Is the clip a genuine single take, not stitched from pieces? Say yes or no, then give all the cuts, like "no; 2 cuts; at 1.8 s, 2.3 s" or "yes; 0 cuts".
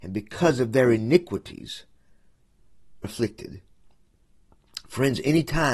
no; 1 cut; at 3.0 s